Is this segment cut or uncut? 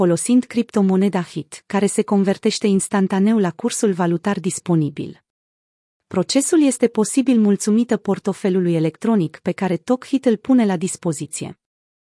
uncut